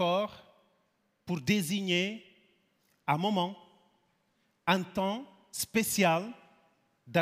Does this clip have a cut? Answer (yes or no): no